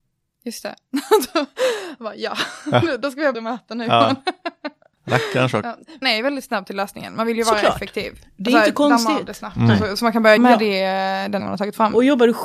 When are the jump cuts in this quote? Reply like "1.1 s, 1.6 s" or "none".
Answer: 3.3 s, 6.0 s, 10.4 s, 11.4 s